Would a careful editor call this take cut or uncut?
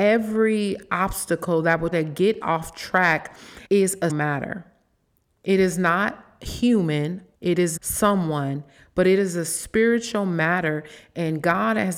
cut